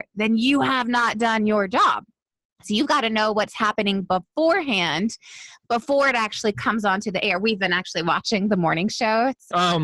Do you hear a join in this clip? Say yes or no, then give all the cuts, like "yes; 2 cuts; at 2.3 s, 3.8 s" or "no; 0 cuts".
no; 0 cuts